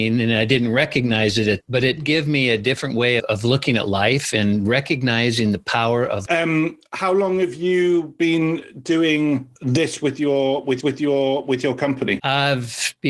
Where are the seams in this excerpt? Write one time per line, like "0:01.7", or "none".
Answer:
0:01.6
0:02.0
0:03.2
0:06.3
0:09.6
0:10.8